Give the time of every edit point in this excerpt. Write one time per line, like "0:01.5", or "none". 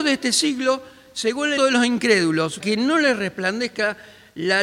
0:01.6
0:02.6